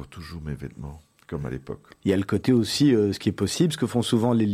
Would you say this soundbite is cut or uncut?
uncut